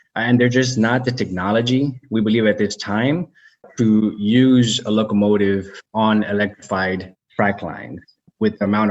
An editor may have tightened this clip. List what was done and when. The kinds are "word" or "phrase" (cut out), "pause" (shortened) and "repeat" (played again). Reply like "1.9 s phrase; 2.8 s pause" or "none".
none